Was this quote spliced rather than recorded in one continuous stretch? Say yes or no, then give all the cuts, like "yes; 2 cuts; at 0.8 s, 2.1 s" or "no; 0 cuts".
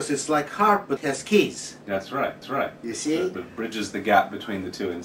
yes; 3 cuts; at 1.0 s, 2.4 s, 3.3 s